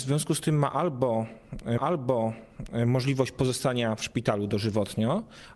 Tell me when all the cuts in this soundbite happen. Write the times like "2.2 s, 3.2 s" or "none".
1.8 s